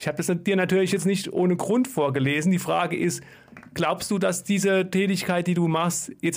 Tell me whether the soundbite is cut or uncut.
uncut